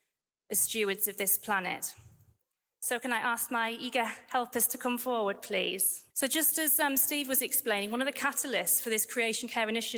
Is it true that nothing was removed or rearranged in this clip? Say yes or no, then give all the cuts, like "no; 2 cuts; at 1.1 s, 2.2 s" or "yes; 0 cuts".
no; 1 cut; at 6.1 s